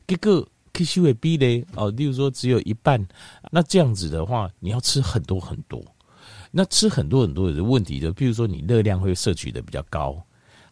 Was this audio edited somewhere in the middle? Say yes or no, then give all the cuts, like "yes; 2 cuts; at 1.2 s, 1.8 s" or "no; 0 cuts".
yes; 1 cut; at 3.5 s